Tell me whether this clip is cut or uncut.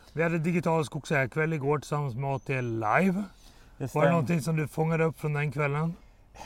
uncut